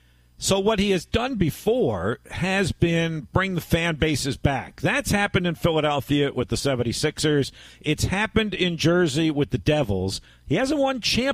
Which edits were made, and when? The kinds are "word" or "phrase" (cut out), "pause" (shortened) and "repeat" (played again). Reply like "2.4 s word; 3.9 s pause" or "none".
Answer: none